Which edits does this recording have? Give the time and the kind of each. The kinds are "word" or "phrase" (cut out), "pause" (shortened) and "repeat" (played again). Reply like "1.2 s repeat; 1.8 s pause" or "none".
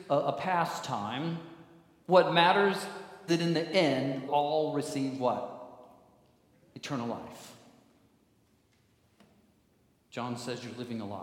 3.3 s word; 4.3 s word